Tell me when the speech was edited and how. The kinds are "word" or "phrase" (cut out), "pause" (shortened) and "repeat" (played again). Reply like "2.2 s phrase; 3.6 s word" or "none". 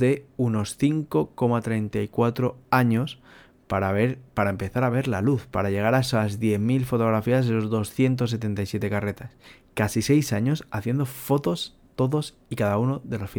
none